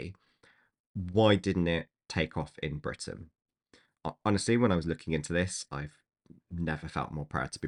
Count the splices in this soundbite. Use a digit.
0